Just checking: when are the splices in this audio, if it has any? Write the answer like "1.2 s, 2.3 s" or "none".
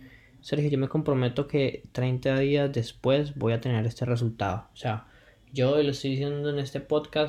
none